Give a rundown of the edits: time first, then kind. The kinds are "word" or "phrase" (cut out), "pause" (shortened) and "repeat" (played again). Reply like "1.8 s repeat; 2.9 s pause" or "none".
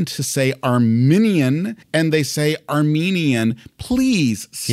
1.8 s pause